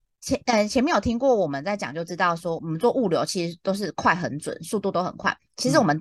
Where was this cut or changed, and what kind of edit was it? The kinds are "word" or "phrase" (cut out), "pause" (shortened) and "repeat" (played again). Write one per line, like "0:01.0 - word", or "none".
0:02.6 - word